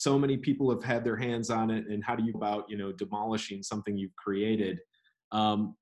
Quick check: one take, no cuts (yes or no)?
no